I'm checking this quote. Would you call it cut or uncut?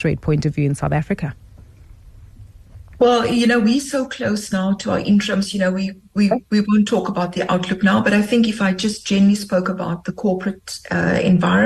uncut